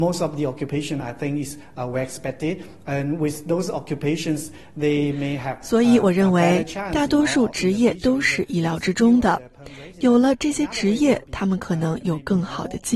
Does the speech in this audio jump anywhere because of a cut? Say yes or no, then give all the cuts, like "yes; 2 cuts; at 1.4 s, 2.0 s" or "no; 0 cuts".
no; 0 cuts